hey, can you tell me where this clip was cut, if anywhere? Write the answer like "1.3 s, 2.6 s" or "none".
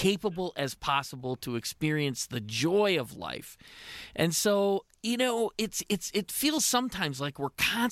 none